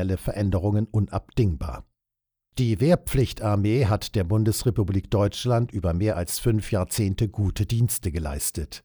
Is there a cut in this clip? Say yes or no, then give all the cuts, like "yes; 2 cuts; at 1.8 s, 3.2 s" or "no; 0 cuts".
no; 0 cuts